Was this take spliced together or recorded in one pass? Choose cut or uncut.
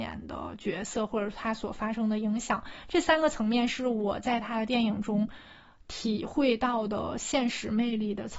uncut